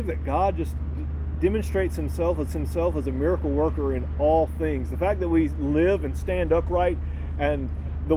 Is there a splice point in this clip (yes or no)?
yes